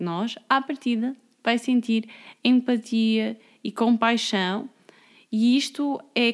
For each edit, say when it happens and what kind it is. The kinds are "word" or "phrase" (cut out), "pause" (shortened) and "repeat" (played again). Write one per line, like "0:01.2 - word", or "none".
none